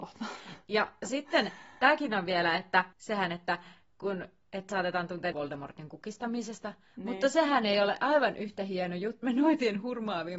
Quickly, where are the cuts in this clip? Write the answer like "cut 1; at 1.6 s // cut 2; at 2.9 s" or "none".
cut 1; at 2.9 s // cut 2; at 4.7 s // cut 3; at 5.3 s // cut 4; at 9.2 s